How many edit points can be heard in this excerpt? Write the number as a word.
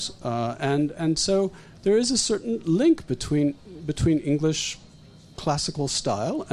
zero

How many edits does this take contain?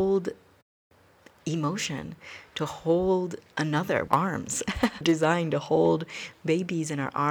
two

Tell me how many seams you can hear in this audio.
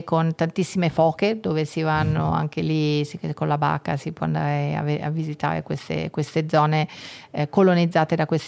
zero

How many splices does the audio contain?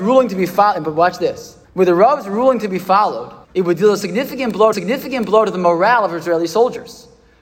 three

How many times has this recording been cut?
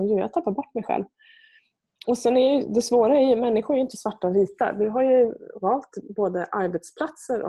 zero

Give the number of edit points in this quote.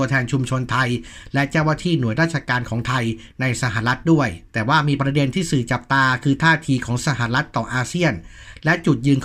one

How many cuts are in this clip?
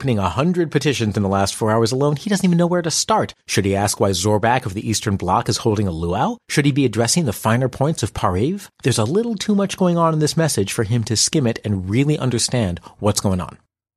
three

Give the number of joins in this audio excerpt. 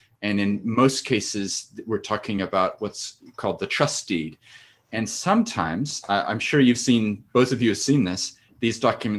zero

